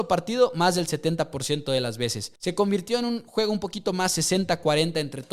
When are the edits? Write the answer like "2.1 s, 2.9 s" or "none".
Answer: 2.4 s